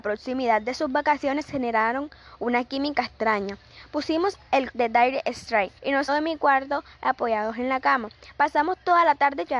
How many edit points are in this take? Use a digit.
3